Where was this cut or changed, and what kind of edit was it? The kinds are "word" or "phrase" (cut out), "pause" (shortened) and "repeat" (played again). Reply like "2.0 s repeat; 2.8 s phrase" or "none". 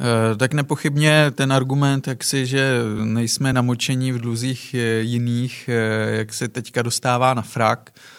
none